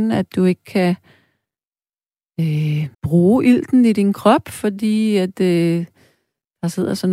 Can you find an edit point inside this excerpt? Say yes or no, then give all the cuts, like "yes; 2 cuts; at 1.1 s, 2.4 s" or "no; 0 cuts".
yes; 1 cut; at 2.9 s